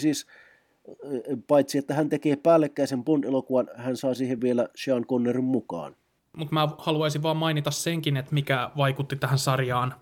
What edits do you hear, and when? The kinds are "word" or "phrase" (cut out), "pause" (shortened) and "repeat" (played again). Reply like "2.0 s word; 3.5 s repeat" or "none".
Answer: none

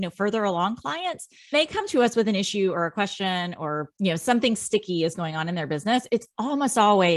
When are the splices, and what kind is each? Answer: 1.5 s word; 3.9 s pause

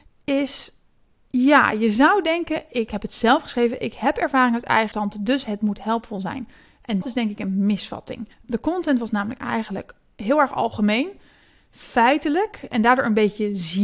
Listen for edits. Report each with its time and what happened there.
4.9 s word; 7.0 s word; 8.3 s pause

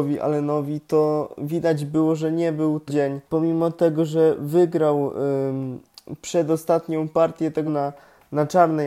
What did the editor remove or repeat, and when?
2.9 s word; 3.2 s pause; 5.9 s pause; 7.7 s word

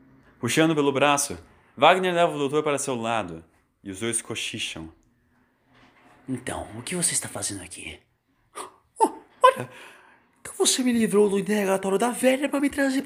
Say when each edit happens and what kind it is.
none

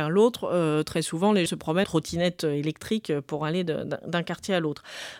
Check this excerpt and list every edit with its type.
1.5 s word; 1.8 s word

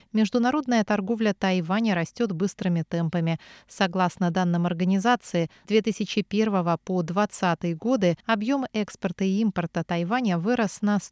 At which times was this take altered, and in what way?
5.6 s word; 8.2 s pause

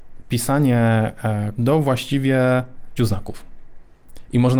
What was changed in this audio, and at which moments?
1.6 s word; 3.0 s word

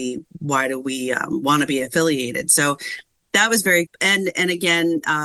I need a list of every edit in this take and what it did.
3.9 s word

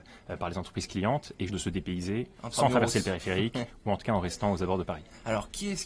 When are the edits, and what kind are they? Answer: 1.5 s word

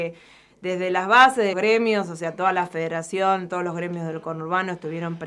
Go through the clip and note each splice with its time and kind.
1.5 s word

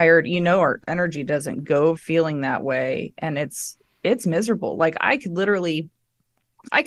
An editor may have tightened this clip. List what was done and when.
2.0 s phrase

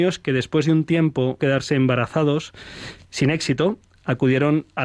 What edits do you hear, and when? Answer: 1.4 s word

